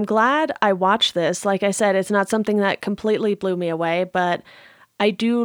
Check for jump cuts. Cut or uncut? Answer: uncut